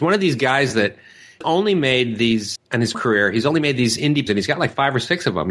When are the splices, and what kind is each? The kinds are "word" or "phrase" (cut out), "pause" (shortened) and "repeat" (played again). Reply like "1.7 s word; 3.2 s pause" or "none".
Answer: 1.4 s word; 2.6 s word; 2.9 s word; 4.3 s word